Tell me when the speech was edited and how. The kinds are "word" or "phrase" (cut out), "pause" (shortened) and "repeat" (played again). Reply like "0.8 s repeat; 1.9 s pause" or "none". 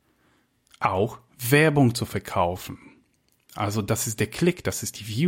none